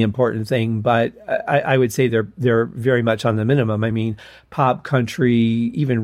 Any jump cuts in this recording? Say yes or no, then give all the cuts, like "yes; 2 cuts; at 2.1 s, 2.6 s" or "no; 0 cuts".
no; 0 cuts